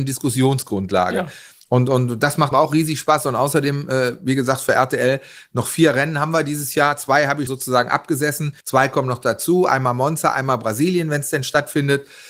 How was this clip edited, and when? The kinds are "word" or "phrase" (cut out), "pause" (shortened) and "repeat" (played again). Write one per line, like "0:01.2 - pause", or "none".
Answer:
0:02.5 - word
0:07.5 - word
0:08.6 - pause